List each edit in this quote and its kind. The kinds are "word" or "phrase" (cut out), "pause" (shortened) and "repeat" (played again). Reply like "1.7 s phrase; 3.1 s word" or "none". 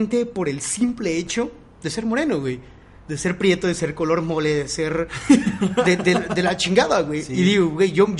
none